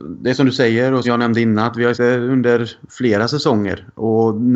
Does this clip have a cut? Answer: yes; 2 cuts; at 1.0 s, 1.9 s

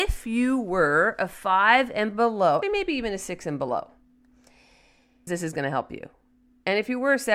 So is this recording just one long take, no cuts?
no; 2 cuts; at 2.6 s, 5.3 s

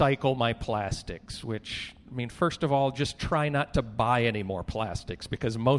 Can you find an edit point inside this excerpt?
no; 0 cuts

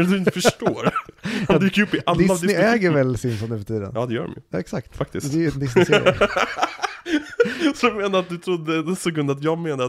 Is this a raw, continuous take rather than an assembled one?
yes; 0 cuts

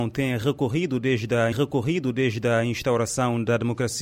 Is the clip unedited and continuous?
no; 1 cut; at 1.5 s

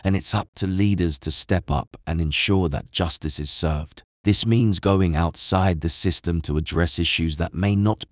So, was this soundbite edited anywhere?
yes; 1 cut; at 4.1 s

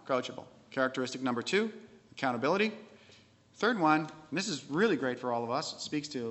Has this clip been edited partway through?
no; 0 cuts

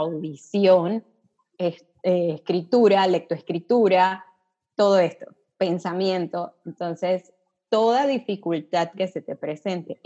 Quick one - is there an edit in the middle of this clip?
no; 0 cuts

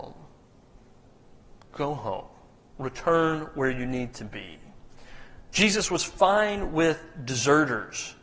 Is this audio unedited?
yes; 0 cuts

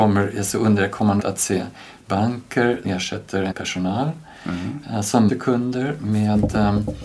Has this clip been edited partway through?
yes; 4 cuts; at 1.2 s, 2.8 s, 3.5 s, 5.3 s

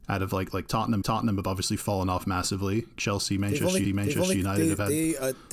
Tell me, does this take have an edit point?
yes; 2 cuts; at 1.0 s, 3.8 s

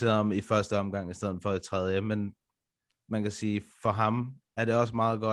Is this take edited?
no; 0 cuts

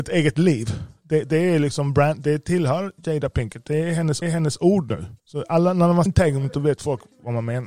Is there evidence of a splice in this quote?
yes; 3 cuts; at 4.2 s, 5.2 s, 6.1 s

